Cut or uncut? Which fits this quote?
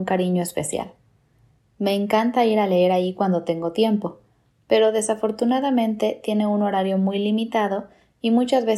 uncut